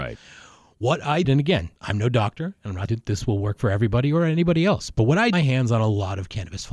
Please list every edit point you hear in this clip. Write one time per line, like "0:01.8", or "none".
0:01.2
0:01.8
0:02.9
0:05.3